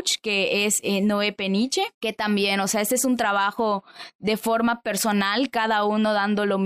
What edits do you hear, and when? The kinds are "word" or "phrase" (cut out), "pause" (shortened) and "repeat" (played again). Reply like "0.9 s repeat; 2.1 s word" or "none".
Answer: 1.9 s pause